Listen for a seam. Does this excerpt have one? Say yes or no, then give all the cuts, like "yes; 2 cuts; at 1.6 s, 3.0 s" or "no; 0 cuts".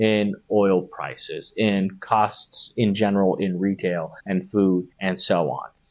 yes; 2 cuts; at 4.2 s, 4.9 s